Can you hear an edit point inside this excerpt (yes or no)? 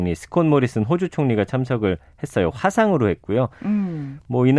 no